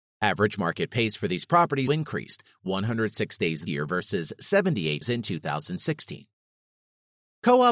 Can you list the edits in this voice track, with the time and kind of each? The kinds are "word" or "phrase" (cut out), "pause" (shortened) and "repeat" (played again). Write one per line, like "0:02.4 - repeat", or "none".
0:01.9 - word
0:03.7 - word
0:05.0 - word